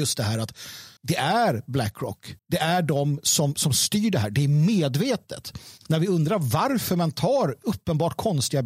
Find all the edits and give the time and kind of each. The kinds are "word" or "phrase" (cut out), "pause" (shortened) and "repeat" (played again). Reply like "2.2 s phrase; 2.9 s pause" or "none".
1.0 s pause; 2.4 s pause; 5.8 s pause